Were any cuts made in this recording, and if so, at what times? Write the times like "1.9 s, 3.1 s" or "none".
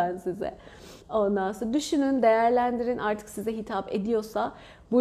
1.0 s